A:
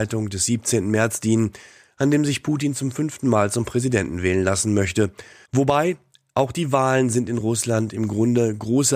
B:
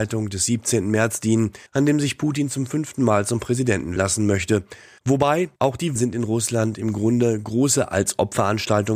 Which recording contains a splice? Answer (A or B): B